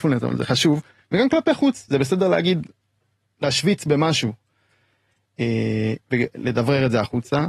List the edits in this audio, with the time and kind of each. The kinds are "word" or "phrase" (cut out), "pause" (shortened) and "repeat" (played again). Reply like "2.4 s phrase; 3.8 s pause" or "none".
6.0 s pause